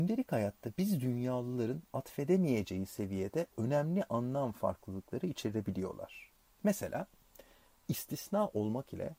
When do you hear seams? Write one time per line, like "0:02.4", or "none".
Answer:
none